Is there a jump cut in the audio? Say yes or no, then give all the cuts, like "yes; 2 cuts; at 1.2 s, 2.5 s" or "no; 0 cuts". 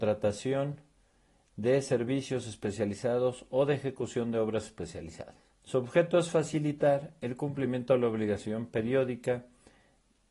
yes; 1 cut; at 5.5 s